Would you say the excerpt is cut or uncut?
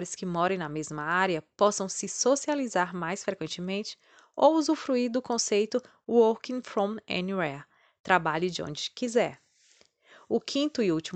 uncut